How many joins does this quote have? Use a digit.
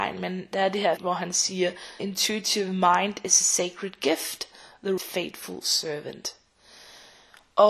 3